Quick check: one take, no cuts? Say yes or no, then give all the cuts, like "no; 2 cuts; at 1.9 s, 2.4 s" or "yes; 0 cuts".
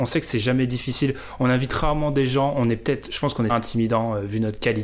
no; 1 cut; at 3.5 s